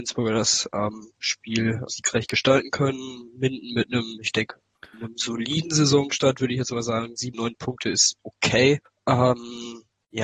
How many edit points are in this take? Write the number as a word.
two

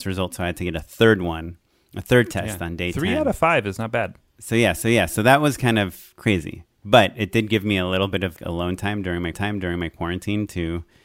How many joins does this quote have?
three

